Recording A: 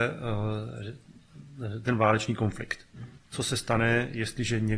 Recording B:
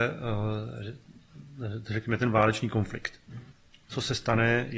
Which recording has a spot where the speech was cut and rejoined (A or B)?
A